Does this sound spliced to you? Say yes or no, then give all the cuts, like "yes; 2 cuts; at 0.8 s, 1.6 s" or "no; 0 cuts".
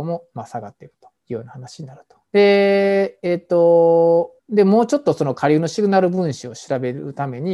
yes; 3 cuts; at 1.1 s, 2.3 s, 4.4 s